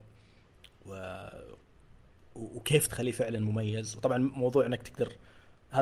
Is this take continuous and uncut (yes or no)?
no